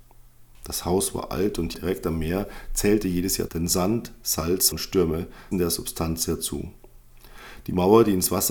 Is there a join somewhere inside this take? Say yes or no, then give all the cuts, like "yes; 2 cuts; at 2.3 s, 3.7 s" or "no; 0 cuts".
yes; 4 cuts; at 1.7 s, 3.5 s, 4.7 s, 5.5 s